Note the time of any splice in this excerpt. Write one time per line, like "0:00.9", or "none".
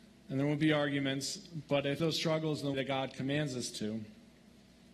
0:02.0
0:02.7